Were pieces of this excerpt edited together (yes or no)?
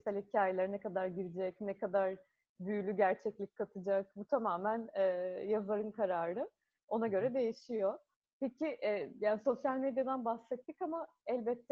no